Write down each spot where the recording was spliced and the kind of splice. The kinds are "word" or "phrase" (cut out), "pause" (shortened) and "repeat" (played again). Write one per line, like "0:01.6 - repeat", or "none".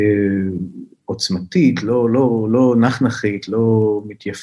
none